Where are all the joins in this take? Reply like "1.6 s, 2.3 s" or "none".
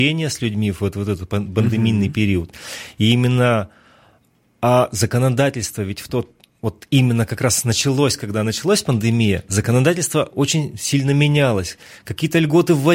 none